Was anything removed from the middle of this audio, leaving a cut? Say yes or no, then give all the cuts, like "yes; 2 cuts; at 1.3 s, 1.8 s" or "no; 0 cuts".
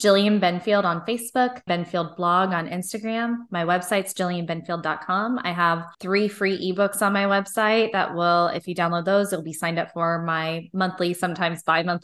yes; 2 cuts; at 1.7 s, 5.9 s